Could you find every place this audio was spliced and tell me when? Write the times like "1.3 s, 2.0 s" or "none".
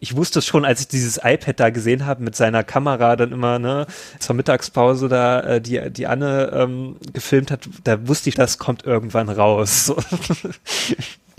3.2 s, 4.2 s, 8.3 s

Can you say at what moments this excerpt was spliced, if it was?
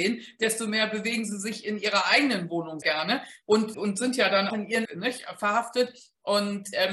2.8 s, 3.7 s, 4.5 s, 4.8 s

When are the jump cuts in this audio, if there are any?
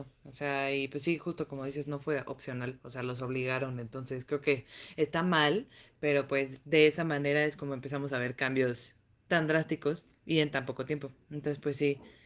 none

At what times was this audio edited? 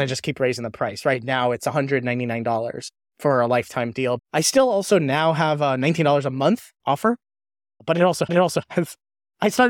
8.3 s

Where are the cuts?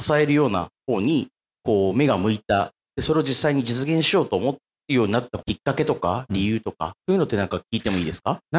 7.0 s

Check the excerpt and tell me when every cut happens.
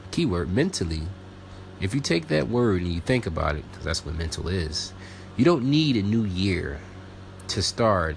none

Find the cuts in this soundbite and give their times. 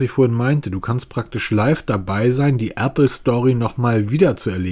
none

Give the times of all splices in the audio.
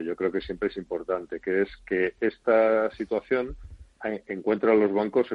none

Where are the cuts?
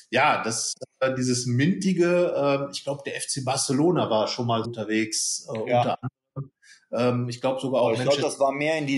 4.6 s

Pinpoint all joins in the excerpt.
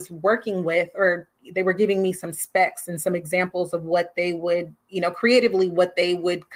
4.8 s

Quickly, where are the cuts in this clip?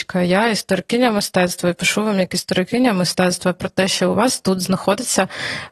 none

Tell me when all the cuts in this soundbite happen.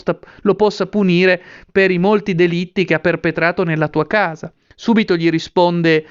none

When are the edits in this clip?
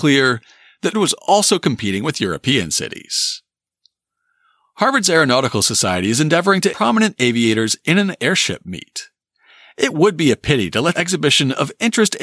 0.9 s, 6.7 s, 10.9 s

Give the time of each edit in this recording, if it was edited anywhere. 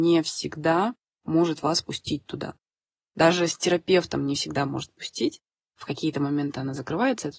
none

